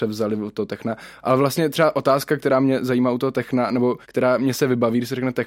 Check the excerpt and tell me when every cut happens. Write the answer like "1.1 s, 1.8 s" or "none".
4.0 s